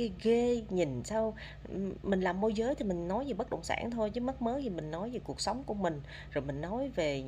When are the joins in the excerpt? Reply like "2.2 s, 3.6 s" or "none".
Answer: none